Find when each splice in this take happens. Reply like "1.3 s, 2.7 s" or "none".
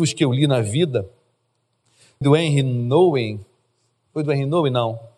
2.2 s